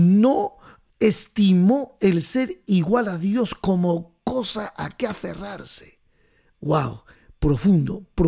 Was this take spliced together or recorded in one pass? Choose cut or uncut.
uncut